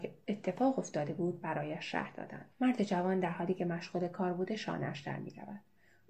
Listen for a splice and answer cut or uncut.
cut